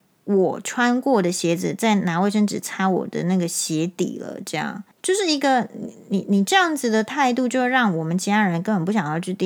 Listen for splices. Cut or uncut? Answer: cut